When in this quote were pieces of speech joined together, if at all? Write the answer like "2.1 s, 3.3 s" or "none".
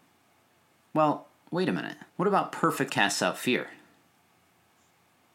2.1 s, 2.9 s